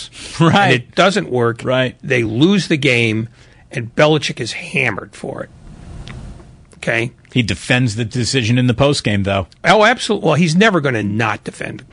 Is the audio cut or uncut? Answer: uncut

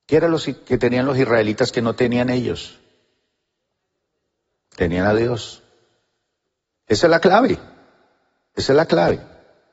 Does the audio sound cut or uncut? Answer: uncut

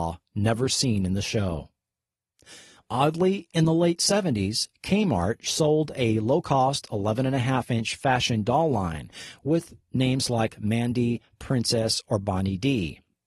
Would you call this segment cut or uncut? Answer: uncut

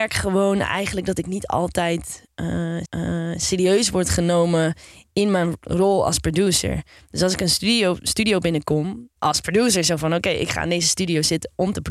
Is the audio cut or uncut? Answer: cut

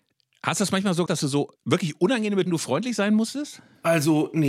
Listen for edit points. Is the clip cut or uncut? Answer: cut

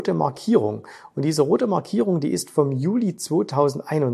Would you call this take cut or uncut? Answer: uncut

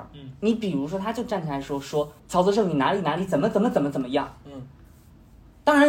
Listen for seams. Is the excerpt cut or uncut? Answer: cut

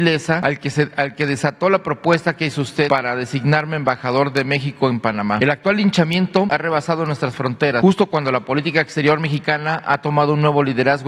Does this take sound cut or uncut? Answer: uncut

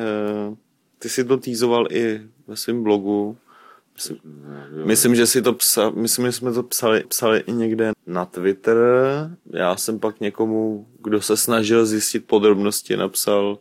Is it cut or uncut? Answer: cut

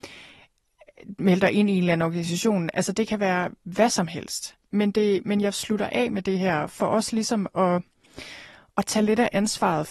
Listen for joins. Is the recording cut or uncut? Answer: uncut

